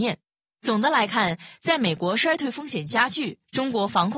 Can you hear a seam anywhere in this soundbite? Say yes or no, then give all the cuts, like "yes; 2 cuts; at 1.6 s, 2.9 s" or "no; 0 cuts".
no; 0 cuts